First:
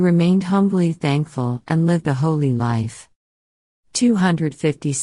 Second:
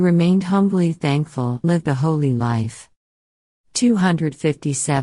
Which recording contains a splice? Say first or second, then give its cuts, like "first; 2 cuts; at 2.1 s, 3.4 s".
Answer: second; 1 cut; at 1.6 s